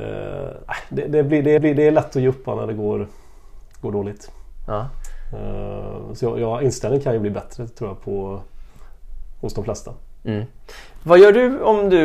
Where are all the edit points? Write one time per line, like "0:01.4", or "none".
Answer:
0:01.6
0:03.7